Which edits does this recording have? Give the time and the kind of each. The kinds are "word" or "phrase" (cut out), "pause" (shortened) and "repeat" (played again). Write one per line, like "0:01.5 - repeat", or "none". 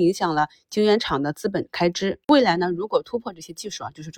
0:02.2 - pause